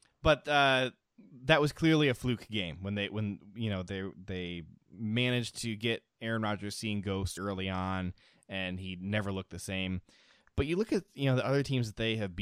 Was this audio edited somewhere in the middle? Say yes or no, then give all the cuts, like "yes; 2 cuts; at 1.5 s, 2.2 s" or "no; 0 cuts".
yes; 1 cut; at 7.4 s